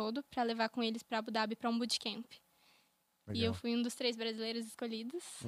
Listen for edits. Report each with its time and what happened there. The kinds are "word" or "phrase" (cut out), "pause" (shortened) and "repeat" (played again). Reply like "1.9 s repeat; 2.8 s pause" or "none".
none

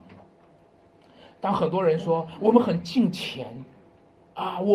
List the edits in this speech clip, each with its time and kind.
none

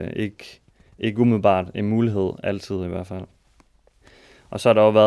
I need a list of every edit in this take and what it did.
none

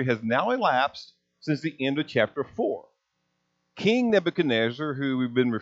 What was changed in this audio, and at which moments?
none

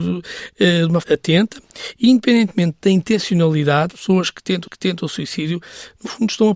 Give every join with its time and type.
1.0 s word; 3.9 s word; 4.7 s repeat

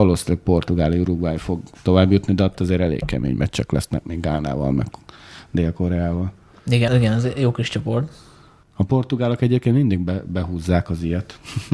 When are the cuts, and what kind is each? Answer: 6.9 s word

